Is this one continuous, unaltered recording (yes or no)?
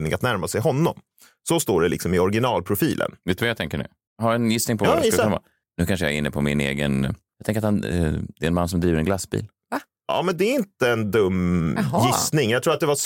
yes